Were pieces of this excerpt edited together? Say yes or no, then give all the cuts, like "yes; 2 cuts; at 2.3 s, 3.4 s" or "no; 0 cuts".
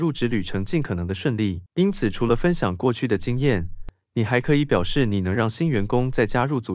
yes; 1 cut; at 1.7 s